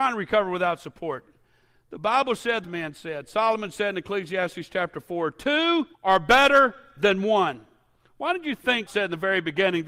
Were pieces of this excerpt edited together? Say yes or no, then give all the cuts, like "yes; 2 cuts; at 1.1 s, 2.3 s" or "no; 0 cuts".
yes; 3 cuts; at 2.6 s, 5.9 s, 8.9 s